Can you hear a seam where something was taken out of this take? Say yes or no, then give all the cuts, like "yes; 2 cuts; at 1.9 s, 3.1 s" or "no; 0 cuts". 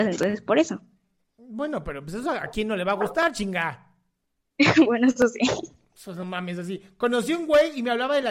no; 0 cuts